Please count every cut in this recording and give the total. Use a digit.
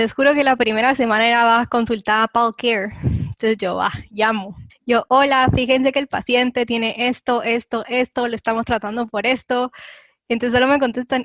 1